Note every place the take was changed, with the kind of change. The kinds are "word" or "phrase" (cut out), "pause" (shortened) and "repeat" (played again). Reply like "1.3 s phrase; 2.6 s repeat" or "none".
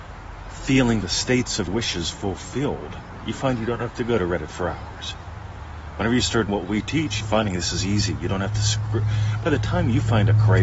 1.0 s word; 1.7 s word; 6.5 s word; 7.2 s phrase